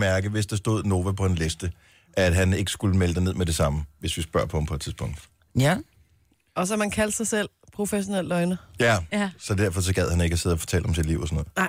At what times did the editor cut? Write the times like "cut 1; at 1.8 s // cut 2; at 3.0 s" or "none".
none